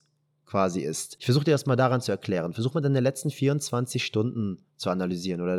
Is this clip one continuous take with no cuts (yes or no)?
yes